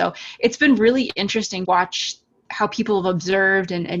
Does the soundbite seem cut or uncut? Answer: cut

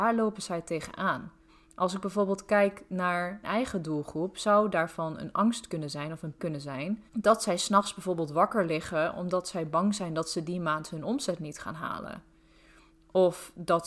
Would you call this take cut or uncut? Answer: cut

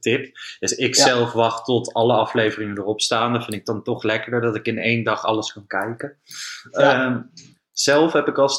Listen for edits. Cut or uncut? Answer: uncut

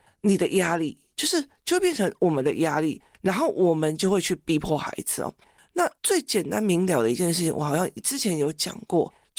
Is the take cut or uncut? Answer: cut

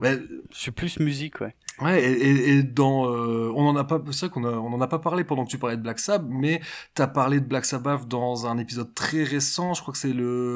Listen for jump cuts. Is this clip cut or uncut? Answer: uncut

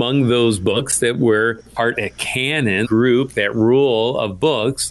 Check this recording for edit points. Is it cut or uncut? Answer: cut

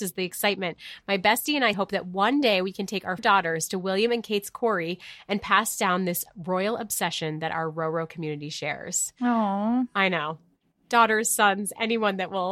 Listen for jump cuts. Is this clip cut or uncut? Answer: cut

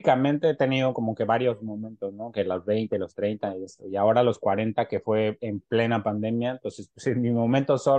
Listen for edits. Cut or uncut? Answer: uncut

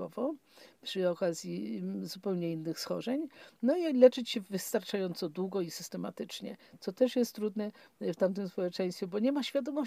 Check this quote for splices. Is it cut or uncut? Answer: uncut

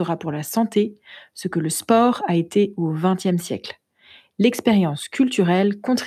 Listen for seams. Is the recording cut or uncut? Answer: uncut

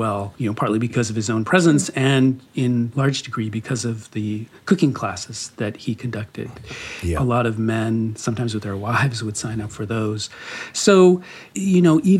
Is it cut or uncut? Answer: cut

